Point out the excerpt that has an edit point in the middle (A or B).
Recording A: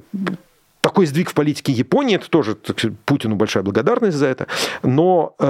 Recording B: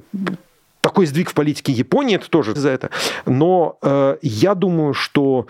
B